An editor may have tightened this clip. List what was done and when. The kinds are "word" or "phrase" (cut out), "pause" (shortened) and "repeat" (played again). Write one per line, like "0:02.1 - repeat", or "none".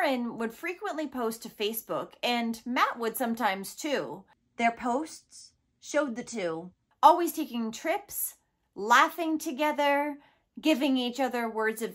none